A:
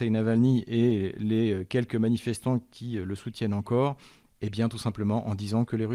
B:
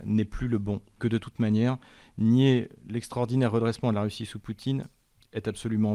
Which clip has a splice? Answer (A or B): B